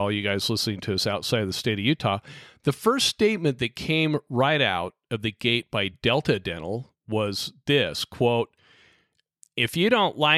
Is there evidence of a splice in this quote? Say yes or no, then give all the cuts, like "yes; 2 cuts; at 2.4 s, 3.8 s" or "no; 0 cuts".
no; 0 cuts